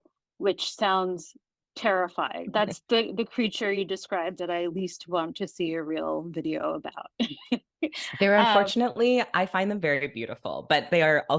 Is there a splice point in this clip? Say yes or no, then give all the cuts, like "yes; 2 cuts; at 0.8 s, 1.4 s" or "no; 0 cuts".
no; 0 cuts